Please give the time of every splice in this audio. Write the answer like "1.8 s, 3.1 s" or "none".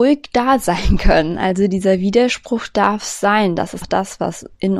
3.8 s

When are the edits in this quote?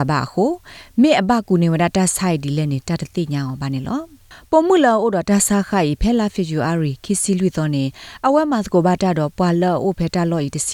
none

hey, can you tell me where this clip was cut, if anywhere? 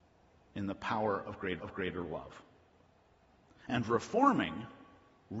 1.6 s

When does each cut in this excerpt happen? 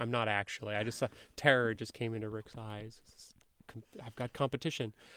none

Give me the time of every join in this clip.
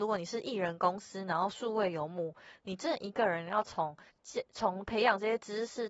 4.1 s

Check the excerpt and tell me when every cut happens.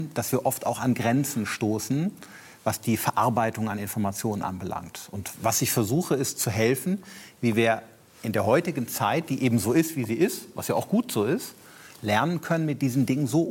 none

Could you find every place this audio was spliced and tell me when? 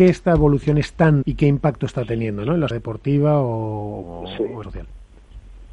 1.2 s, 2.7 s, 4.0 s, 4.6 s

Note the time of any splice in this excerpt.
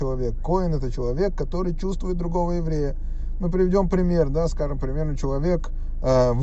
none

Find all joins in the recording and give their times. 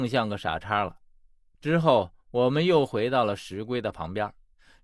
none

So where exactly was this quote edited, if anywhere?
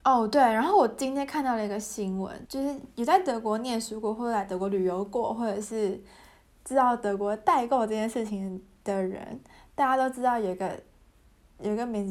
2.4 s

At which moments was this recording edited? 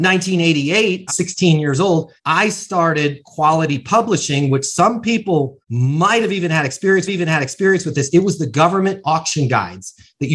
1.1 s, 2.2 s, 5.6 s, 7.1 s

